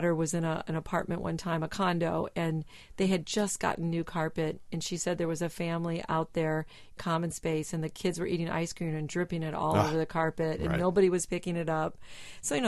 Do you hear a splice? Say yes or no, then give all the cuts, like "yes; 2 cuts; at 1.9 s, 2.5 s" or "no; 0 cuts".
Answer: yes; 1 cut; at 7.0 s